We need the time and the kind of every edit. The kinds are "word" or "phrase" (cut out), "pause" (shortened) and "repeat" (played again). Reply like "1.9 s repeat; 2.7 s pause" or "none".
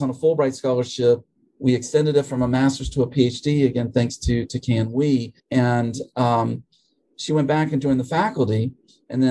5.4 s pause